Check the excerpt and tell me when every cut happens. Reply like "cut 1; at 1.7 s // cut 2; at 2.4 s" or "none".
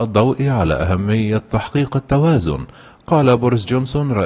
none